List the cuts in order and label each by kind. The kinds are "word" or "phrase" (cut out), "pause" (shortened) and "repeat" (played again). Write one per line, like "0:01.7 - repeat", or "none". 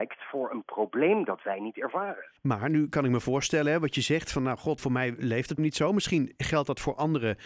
0:02.4 - pause
0:04.8 - word
0:05.6 - word